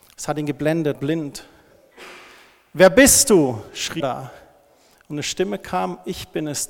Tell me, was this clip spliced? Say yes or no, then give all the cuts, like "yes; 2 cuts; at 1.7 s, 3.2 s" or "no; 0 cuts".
yes; 2 cuts; at 0.9 s, 4.0 s